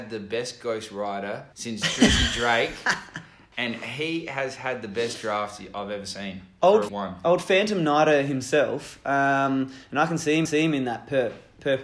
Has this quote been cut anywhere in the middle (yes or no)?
yes